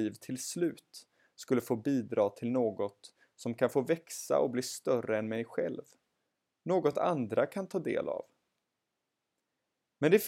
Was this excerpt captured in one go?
yes; 0 cuts

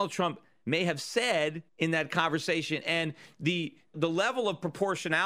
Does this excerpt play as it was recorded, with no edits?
no; 1 cut; at 1.7 s

